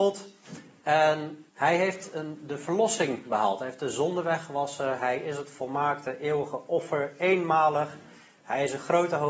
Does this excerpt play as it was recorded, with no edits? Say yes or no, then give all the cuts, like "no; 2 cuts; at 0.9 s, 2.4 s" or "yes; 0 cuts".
no; 1 cut; at 1.5 s